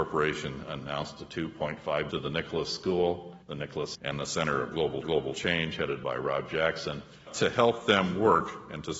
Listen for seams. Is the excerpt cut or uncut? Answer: cut